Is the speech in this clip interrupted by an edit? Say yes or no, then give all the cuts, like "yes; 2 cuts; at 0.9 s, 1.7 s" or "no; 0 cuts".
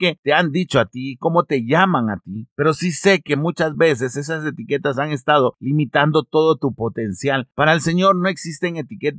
no; 0 cuts